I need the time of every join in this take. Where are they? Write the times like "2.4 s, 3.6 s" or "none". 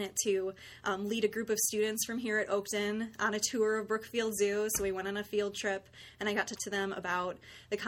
6.6 s